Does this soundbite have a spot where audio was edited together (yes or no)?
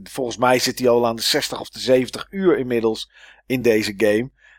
no